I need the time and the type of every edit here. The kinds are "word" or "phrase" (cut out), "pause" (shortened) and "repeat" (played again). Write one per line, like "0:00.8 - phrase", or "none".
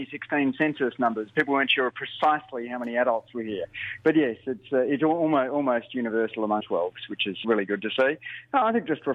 0:06.6 - word
0:07.4 - word